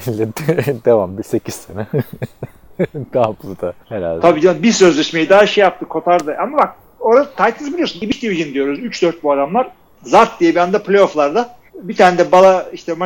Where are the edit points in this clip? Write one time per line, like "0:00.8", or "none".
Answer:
0:03.8
0:09.9
0:11.7